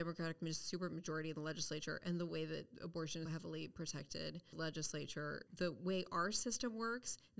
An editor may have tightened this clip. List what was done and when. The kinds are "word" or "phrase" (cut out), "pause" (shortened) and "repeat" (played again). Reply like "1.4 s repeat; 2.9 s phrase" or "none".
3.3 s word; 4.5 s phrase; 5.5 s pause